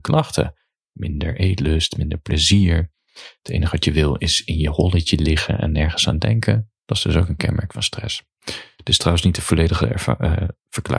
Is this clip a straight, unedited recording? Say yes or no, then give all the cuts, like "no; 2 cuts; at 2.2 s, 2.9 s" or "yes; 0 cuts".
no; 1 cut; at 6.8 s